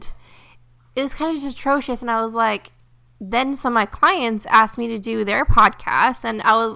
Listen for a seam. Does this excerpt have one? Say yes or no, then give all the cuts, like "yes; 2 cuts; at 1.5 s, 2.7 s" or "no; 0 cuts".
no; 0 cuts